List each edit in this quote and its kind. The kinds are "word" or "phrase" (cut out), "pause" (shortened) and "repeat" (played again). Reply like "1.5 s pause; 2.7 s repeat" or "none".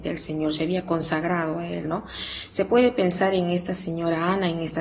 none